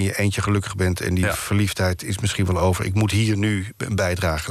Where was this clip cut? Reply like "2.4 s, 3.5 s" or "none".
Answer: none